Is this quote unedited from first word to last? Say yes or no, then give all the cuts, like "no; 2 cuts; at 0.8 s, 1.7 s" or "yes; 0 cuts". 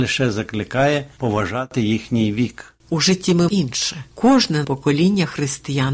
no; 2 cuts; at 3.5 s, 4.6 s